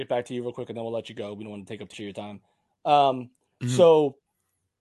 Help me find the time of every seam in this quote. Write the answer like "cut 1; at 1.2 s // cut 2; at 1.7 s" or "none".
cut 1; at 1.9 s